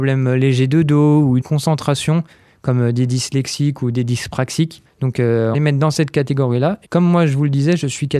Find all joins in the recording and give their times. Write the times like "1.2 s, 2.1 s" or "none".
1.4 s, 4.9 s, 5.5 s, 6.8 s